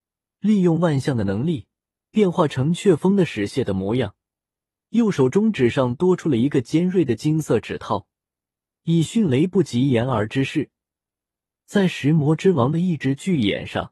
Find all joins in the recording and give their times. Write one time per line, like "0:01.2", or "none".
none